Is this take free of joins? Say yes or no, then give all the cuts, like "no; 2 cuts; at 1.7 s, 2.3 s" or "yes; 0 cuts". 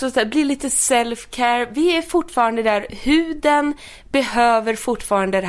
yes; 0 cuts